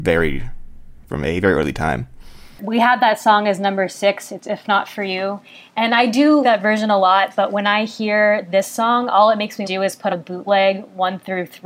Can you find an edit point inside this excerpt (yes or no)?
yes